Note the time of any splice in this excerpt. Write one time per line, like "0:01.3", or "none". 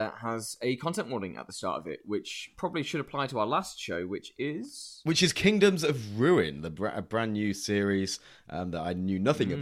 none

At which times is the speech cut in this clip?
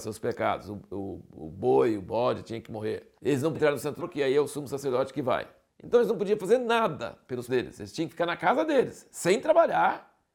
0:03.2
0:03.5
0:04.0
0:05.7
0:07.5

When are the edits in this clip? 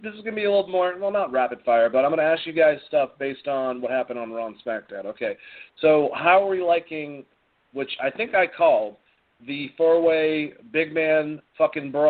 none

